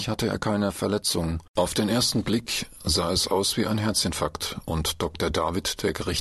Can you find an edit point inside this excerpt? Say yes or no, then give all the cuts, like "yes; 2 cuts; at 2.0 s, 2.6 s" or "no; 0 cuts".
yes; 1 cut; at 1.5 s